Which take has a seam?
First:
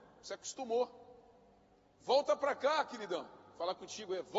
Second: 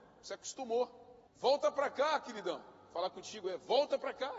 second; 1 cut; at 1.3 s

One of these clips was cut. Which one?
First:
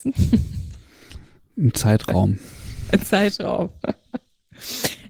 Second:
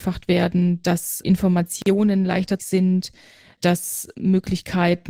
second; 2 cuts; at 1.2 s, 2.6 s

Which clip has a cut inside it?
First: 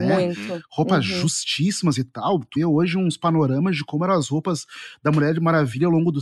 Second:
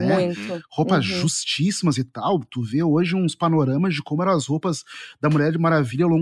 first; 1 cut; at 2.6 s

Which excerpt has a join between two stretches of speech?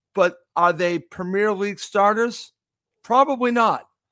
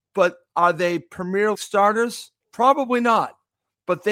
second; 2 cuts; at 1.5 s, 2.4 s

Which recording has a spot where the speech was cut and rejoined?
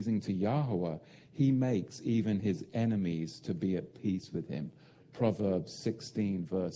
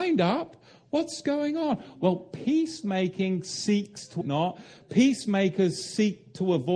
second; 1 cut; at 4.2 s

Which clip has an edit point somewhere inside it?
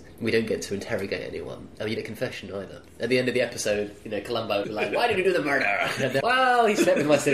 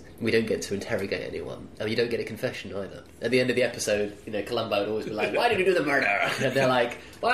first; 3 cuts; at 2.0 s, 4.6 s, 6.2 s

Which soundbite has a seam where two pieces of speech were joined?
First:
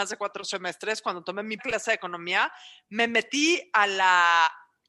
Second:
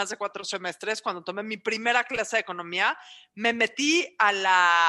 first; 1 cut; at 1.6 s

